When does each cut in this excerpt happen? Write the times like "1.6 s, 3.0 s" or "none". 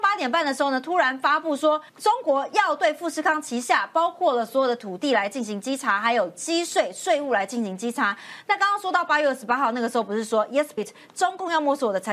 1.9 s, 10.8 s